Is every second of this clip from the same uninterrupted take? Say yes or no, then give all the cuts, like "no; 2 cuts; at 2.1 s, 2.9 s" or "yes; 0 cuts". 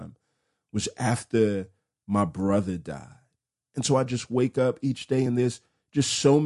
yes; 0 cuts